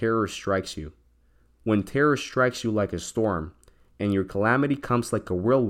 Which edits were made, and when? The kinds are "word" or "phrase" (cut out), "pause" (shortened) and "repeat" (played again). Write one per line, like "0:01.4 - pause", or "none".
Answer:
none